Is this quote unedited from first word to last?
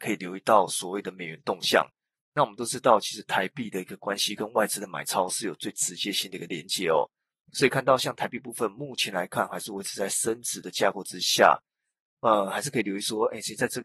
yes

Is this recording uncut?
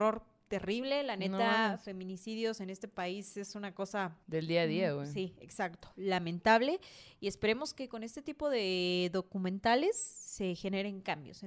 no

